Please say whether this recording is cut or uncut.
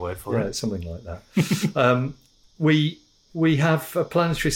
uncut